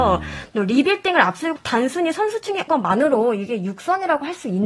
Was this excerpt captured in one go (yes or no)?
no